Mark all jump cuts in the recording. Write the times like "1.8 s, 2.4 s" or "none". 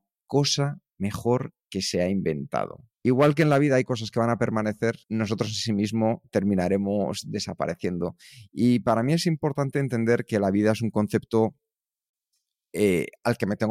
2.9 s, 5.0 s